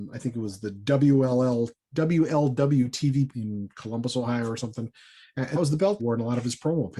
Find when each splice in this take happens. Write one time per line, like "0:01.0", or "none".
0:03.3
0:05.6
0:06.0